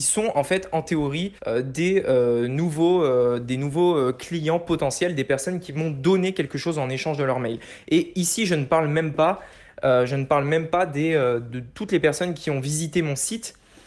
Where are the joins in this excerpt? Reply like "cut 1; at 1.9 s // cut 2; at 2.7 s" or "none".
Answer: cut 1; at 1.4 s